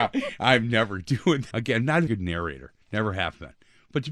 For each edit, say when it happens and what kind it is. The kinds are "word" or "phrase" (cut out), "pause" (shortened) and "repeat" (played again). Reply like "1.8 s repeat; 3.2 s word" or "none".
1.5 s word; 2.1 s word; 2.8 s pause